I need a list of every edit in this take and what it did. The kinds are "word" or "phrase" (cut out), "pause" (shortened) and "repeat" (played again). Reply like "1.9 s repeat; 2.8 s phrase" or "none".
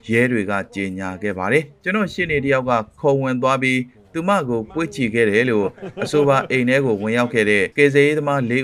7.7 s pause